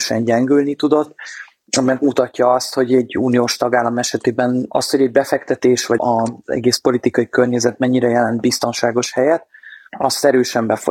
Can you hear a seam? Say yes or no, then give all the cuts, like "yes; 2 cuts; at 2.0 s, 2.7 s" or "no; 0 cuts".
yes; 1 cut; at 6.0 s